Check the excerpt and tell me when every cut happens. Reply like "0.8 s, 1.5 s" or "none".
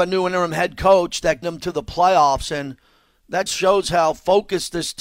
1.4 s, 3.5 s